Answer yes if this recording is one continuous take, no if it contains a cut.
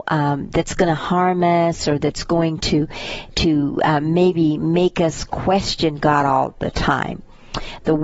yes